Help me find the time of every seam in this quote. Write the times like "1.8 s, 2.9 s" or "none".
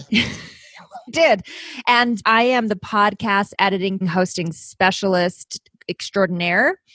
1.1 s, 2.2 s, 4.0 s